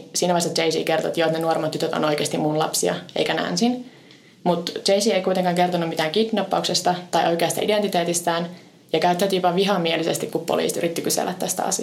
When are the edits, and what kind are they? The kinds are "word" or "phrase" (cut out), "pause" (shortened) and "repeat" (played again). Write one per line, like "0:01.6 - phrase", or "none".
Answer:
none